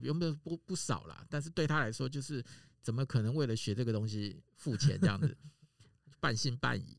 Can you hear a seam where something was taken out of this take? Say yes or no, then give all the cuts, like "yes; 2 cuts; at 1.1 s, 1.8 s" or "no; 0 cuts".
yes; 1 cut; at 4.5 s